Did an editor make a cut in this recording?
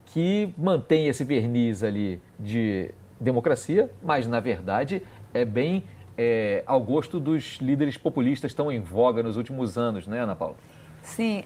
yes; 1 cut; at 2.3 s

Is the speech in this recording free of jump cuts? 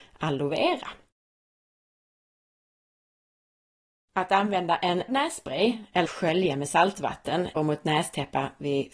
no; 3 cuts; at 5.1 s, 6.1 s, 7.6 s

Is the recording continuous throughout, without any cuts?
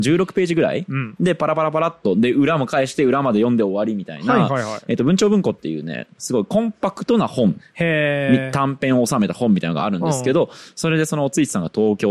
yes; 0 cuts

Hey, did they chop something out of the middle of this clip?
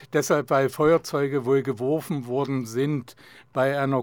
no; 0 cuts

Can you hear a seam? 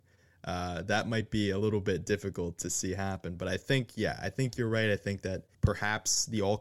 yes; 1 cut; at 5.5 s

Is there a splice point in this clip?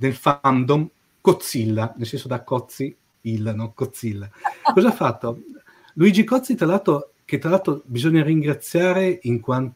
no; 0 cuts

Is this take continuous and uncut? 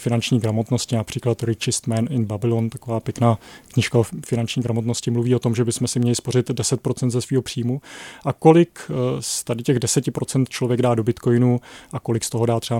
yes; 0 cuts

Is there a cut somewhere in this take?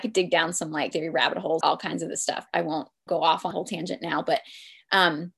yes; 5 cuts; at 0.9 s, 1.6 s, 2.5 s, 3.1 s, 3.5 s

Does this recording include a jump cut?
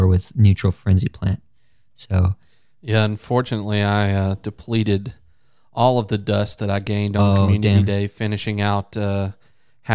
no; 0 cuts

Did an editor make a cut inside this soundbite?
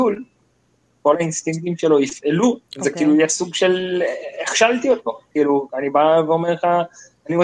yes; 1 cut; at 2.7 s

